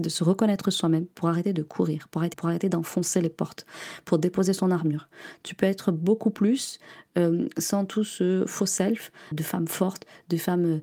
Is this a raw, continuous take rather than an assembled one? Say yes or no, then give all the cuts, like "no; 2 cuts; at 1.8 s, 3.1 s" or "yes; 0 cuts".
no; 2 cuts; at 2.3 s, 9.3 s